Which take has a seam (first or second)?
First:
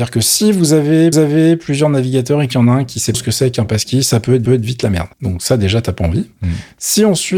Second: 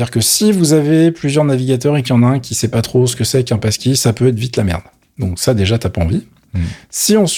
first